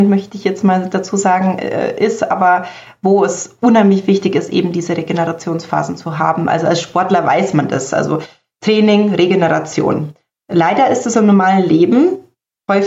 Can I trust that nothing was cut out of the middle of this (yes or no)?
yes